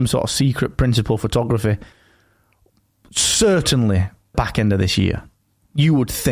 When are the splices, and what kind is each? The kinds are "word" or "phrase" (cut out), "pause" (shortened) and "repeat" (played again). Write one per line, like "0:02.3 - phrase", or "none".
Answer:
0:04.3 - word